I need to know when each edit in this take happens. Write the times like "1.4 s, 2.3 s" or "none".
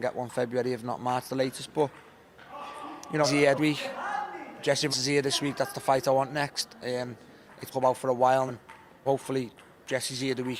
3.2 s, 3.6 s, 4.9 s, 7.7 s, 8.5 s, 9.1 s